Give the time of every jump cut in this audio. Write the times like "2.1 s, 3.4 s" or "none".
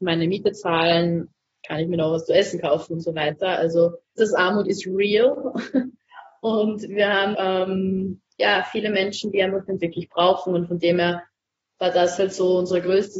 4.2 s, 7.3 s, 9.8 s